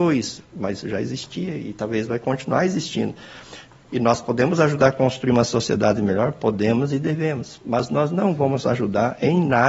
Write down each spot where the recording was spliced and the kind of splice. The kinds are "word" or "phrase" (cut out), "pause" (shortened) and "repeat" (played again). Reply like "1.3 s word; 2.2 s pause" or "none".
none